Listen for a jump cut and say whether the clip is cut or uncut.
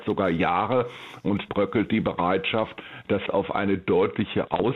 cut